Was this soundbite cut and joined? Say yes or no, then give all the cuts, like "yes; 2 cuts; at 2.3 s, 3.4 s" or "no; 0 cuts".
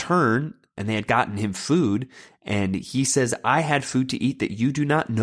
no; 0 cuts